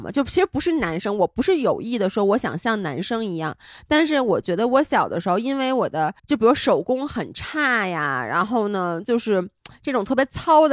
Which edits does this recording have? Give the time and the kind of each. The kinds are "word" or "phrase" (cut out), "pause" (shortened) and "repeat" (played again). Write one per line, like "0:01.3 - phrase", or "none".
0:06.2 - pause